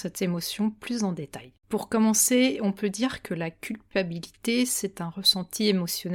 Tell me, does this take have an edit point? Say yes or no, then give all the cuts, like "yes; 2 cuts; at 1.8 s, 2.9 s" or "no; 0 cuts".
yes; 1 cut; at 1.6 s